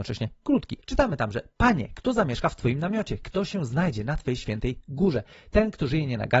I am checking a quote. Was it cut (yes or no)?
no